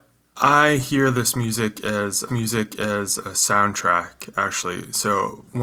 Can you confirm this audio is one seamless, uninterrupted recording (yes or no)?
no